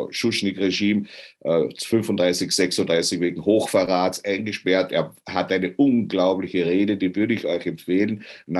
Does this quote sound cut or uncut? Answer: uncut